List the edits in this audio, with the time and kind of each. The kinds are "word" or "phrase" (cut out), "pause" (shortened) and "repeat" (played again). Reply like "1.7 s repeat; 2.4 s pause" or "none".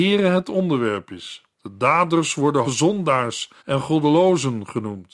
1.5 s pause; 2.6 s word; 3.6 s pause